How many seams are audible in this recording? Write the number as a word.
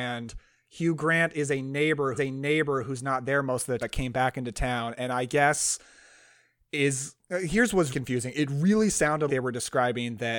five